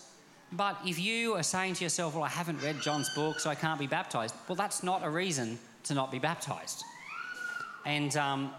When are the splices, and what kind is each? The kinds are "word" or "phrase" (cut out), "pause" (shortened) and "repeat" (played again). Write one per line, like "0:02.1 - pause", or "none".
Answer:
none